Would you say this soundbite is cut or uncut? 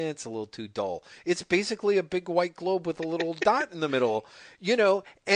uncut